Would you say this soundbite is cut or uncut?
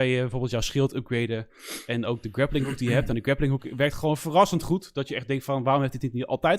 uncut